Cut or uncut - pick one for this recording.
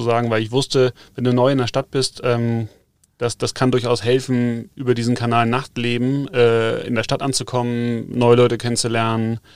uncut